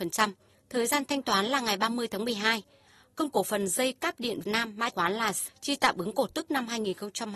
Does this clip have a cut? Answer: yes; 4 cuts; at 3.3 s, 4.4 s, 4.9 s, 5.5 s

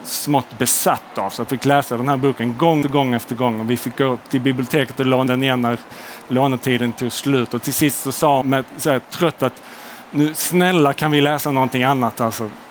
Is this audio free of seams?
no; 5 cuts; at 1.5 s, 2.8 s, 5.3 s, 8.4 s, 9.4 s

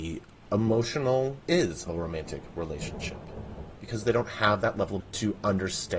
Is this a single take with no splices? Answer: no; 3 cuts; at 1.4 s, 1.9 s, 5.0 s

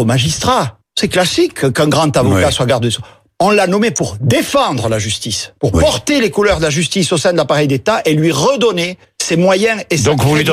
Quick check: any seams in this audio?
no; 0 cuts

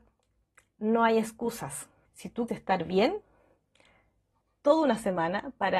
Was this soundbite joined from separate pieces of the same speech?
yes; 3 cuts; at 2.1 s, 2.5 s, 4.4 s

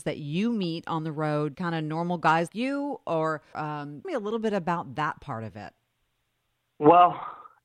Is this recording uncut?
no; 4 cuts; at 1.5 s, 2.5 s, 3.5 s, 4.0 s

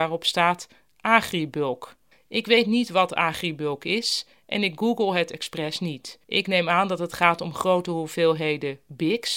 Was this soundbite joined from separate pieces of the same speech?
yes; 2 cuts; at 2.1 s, 6.2 s

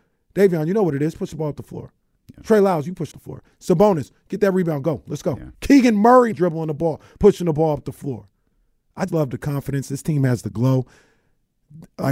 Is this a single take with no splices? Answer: no; 4 cuts; at 3.1 s, 5.5 s, 6.3 s, 9.1 s

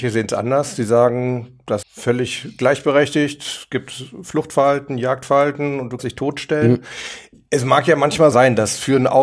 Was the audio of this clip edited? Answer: yes; 3 cuts; at 1.8 s, 6.0 s, 8.3 s

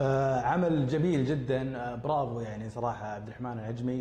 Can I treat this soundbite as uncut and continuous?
yes; 0 cuts

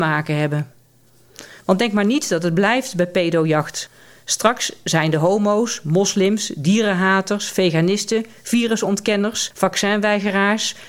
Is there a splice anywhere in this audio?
no; 0 cuts

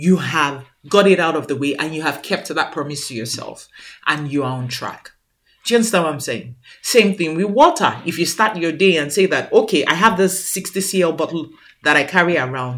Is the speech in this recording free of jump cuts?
yes; 0 cuts

